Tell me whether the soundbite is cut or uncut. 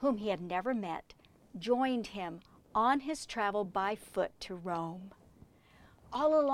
uncut